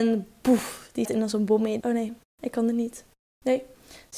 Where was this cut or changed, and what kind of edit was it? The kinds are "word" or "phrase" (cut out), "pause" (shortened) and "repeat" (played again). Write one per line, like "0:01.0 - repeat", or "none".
0:01.0 - word
0:01.8 - word